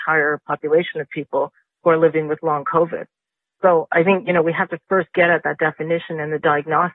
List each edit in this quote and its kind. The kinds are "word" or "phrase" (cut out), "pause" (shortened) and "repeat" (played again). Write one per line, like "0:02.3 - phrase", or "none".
none